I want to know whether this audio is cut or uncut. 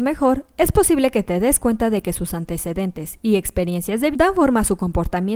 cut